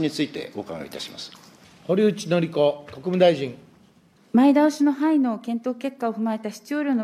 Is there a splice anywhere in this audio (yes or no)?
yes